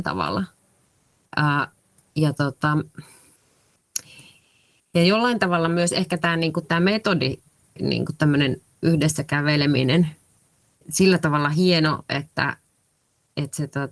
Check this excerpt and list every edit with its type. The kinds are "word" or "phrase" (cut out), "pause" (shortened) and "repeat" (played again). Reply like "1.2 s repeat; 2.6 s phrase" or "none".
10.7 s word